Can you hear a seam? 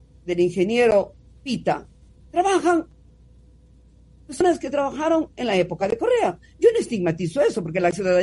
no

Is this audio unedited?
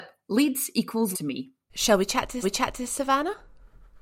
no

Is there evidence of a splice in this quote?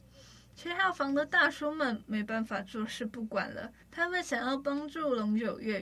yes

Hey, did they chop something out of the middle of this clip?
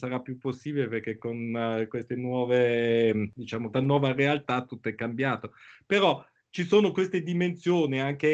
yes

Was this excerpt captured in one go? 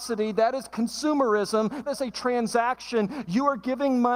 no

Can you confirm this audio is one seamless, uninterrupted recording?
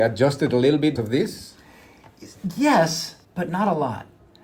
no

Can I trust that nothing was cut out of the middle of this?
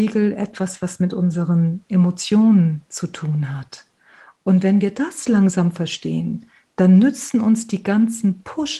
yes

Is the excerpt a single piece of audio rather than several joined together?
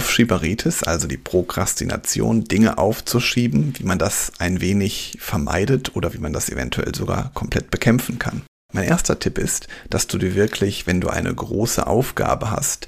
yes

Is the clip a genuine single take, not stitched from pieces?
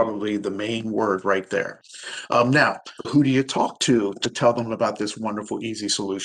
no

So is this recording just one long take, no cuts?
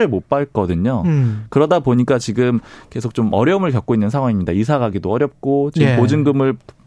yes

